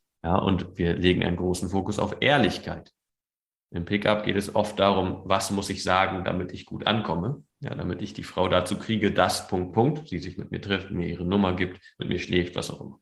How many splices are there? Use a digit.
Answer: 2